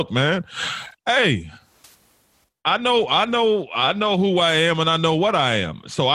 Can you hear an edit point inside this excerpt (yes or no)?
no